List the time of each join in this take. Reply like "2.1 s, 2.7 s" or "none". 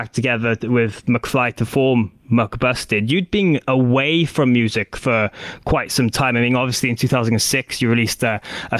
none